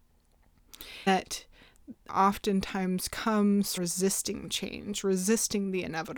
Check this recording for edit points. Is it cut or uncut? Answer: cut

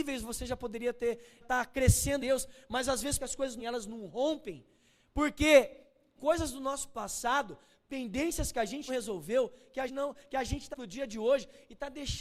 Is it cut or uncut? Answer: cut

